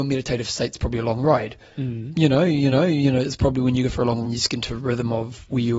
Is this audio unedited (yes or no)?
no